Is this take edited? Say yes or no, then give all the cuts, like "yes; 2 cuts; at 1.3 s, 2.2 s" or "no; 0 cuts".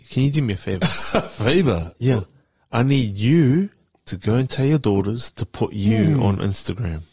no; 0 cuts